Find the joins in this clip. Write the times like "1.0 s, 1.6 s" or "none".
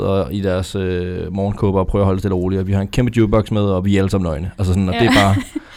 none